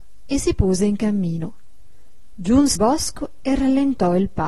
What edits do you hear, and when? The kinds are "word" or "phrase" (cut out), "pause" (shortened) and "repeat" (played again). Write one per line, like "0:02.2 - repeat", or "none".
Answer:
0:02.8 - word